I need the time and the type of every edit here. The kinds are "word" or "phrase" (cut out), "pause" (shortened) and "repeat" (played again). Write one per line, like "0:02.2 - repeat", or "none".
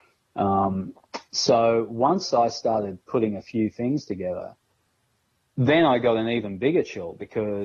none